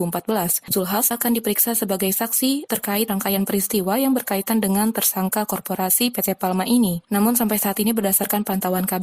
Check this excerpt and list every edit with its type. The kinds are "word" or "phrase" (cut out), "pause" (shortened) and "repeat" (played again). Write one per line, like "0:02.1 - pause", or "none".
none